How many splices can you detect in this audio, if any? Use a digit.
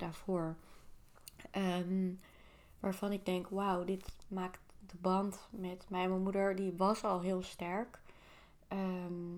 0